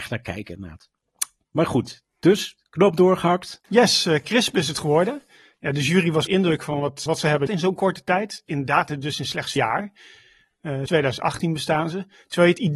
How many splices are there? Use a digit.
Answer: 5